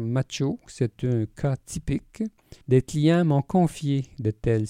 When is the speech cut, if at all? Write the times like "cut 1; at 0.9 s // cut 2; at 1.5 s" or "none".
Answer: cut 1; at 2.6 s